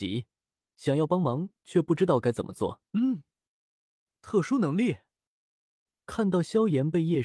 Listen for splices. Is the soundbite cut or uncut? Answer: cut